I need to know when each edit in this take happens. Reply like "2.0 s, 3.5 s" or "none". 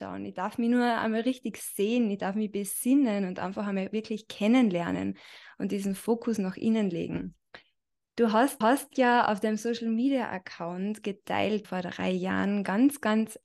8.6 s, 11.6 s